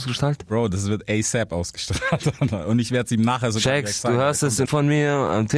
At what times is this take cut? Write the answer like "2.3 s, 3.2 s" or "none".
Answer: 4.6 s